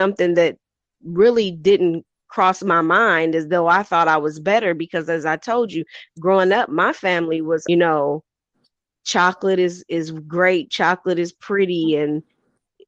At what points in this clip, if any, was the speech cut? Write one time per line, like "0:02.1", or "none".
0:07.7